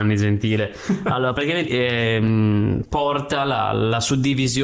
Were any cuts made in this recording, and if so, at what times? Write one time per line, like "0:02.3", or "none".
0:01.7